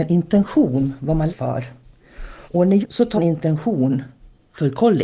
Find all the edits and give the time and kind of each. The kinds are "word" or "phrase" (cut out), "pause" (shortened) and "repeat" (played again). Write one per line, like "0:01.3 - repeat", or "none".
0:01.3 - word
0:02.5 - pause
0:02.8 - phrase
0:03.2 - word